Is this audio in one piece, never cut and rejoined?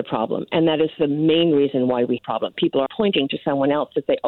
no; 2 cuts; at 2.2 s, 2.9 s

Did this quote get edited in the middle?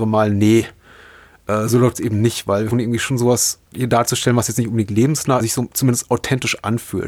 yes; 3 cuts; at 2.7 s, 3.7 s, 5.4 s

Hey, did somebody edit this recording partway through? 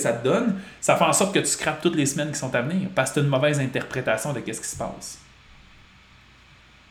no; 0 cuts

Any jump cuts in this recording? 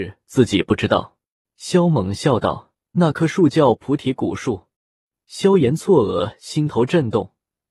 yes; 2 cuts; at 1.4 s, 4.8 s

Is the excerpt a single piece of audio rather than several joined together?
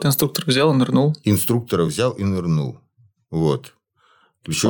yes; 0 cuts

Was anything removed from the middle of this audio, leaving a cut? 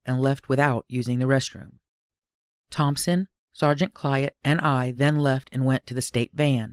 no; 0 cuts

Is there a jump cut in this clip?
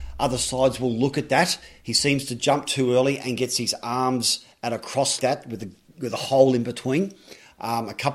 yes; 1 cut; at 5.2 s

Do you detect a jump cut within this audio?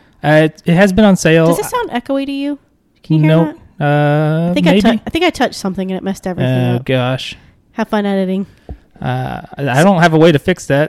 no; 0 cuts

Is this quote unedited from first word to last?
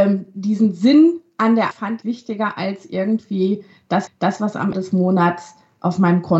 no; 4 cuts; at 1.7 s, 2.0 s, 4.1 s, 4.7 s

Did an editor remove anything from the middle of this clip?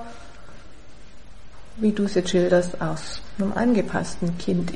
no; 0 cuts

